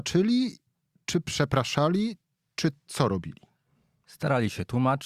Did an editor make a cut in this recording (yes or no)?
no